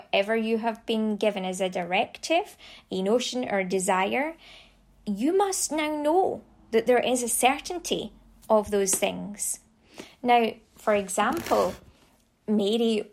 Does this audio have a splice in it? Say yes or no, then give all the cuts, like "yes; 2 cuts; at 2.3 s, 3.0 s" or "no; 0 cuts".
no; 0 cuts